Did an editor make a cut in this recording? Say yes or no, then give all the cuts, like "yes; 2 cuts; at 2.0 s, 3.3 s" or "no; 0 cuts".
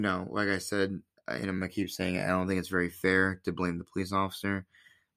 no; 0 cuts